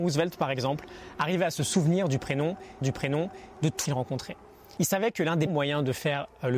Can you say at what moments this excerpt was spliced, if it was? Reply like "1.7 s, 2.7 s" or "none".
2.8 s, 3.9 s, 5.5 s